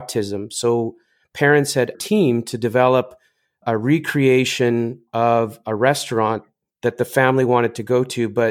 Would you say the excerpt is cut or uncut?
cut